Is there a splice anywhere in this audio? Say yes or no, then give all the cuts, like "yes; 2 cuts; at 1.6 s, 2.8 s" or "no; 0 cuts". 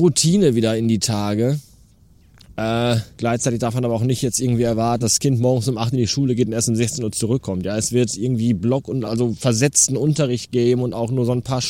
yes; 3 cuts; at 3.1 s, 5.0 s, 9.0 s